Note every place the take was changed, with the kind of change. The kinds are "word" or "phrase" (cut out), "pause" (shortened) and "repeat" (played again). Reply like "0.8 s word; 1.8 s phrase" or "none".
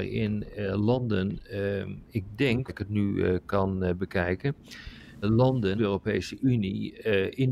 2.7 s phrase; 5.2 s word; 5.8 s phrase

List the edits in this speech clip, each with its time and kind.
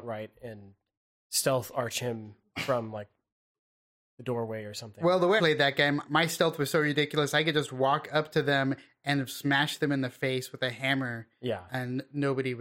5.4 s word

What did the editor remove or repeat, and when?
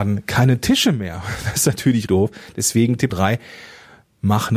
2.1 s word; 3.1 s word

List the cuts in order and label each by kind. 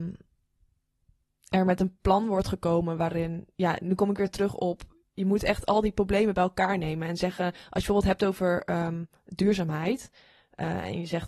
3.5 s pause

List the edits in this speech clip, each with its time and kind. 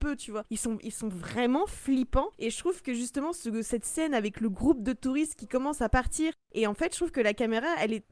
none

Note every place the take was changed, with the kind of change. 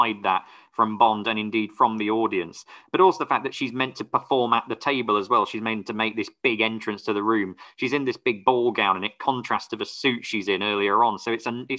none

